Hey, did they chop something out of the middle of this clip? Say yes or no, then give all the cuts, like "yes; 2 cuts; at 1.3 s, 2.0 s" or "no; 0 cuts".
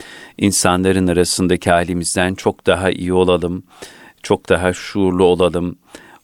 no; 0 cuts